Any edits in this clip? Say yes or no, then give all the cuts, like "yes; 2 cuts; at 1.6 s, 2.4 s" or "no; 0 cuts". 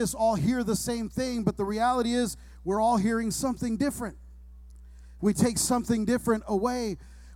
no; 0 cuts